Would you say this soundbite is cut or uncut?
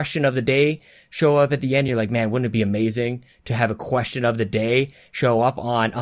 uncut